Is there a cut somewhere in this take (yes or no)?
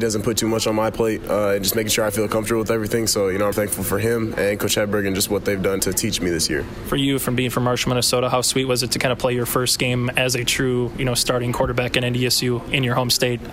yes